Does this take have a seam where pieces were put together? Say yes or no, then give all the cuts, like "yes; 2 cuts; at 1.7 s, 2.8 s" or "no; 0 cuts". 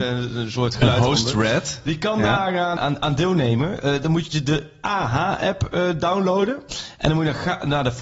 yes; 1 cut; at 2.8 s